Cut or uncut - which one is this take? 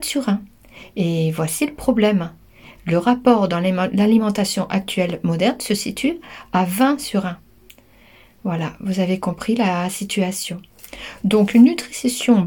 uncut